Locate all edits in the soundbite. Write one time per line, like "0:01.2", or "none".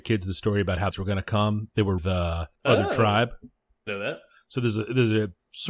0:00.9
0:02.0
0:02.5
0:03.9